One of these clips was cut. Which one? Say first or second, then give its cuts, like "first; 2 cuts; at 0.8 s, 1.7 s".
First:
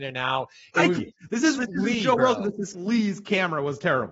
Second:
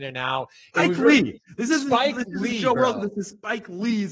first; 3 cuts; at 1.0 s, 1.6 s, 2.7 s